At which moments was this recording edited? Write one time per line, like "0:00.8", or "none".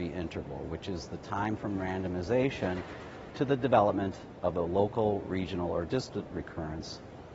none